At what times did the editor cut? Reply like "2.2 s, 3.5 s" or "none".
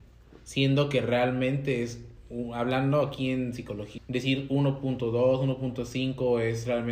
4.0 s